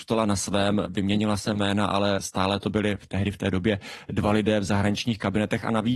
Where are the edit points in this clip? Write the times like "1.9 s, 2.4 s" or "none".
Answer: none